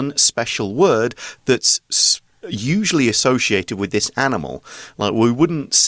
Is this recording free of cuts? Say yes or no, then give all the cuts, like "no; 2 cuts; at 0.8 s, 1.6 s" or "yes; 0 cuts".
yes; 0 cuts